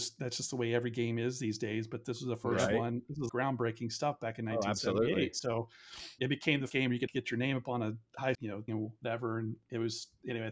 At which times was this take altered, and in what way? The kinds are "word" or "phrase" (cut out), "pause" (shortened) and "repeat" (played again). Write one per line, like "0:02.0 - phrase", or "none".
0:03.3 - word
0:06.2 - word
0:06.7 - word
0:07.1 - word
0:08.3 - word
0:08.7 - word